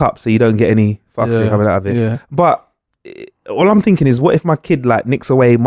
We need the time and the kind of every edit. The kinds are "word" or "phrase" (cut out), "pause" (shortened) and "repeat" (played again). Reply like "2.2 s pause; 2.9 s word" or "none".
2.9 s word